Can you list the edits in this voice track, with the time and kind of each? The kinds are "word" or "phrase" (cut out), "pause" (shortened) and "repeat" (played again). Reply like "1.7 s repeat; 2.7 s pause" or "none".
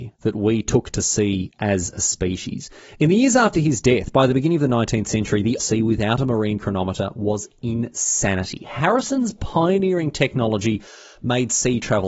5.6 s phrase